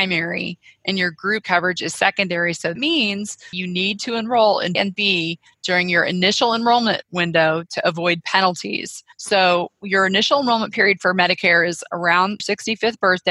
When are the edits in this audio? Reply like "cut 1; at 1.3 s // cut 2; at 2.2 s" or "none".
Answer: cut 1; at 1.4 s // cut 2; at 2.8 s // cut 3; at 3.5 s // cut 4; at 4.7 s // cut 5; at 9.1 s // cut 6; at 12.4 s